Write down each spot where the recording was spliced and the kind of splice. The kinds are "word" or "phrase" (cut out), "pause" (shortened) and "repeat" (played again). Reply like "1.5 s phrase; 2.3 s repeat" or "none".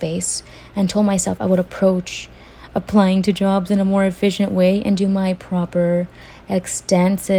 none